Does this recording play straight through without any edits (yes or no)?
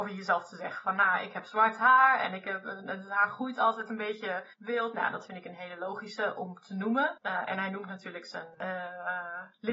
no